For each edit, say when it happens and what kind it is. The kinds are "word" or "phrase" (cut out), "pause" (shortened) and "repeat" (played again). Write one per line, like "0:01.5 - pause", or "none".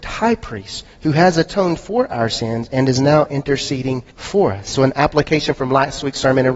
0:04.1 - pause